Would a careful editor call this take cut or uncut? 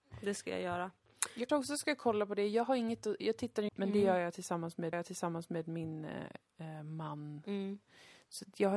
cut